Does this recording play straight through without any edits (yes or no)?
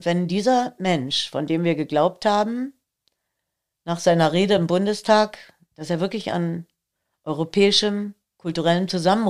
yes